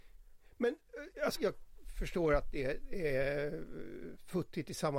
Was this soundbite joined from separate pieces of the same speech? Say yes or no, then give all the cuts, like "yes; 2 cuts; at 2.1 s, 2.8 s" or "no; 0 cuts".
yes; 1 cut; at 1.4 s